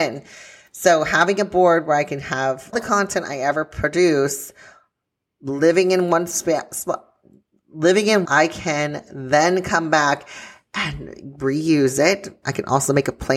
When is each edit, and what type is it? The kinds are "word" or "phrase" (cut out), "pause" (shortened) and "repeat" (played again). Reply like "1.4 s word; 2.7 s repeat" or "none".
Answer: 2.7 s word; 8.2 s phrase